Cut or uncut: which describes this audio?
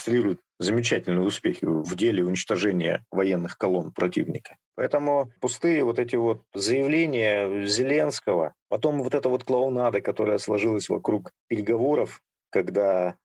uncut